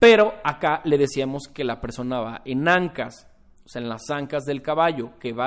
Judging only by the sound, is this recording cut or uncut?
uncut